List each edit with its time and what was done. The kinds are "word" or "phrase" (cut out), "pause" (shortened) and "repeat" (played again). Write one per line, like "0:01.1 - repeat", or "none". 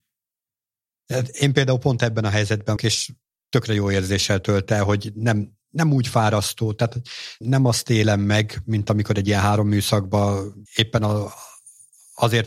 0:02.8 - word
0:05.6 - pause
0:07.4 - word
0:10.7 - pause